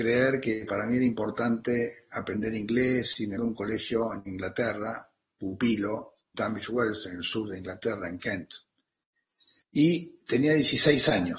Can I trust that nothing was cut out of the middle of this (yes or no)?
no